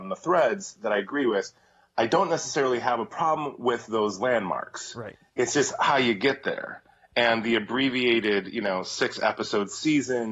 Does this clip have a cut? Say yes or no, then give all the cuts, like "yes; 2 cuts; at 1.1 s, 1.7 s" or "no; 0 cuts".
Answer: no; 0 cuts